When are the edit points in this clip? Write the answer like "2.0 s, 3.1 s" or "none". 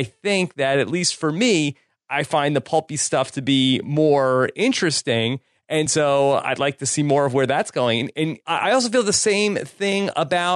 none